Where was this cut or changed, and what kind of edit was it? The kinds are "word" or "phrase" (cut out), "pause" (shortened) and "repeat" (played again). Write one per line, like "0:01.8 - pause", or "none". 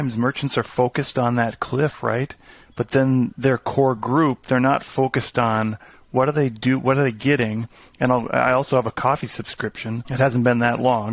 none